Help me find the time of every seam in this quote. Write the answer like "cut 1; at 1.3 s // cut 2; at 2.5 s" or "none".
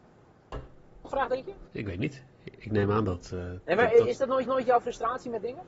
cut 1; at 1.0 s // cut 2; at 1.7 s // cut 3; at 2.3 s // cut 4; at 4.5 s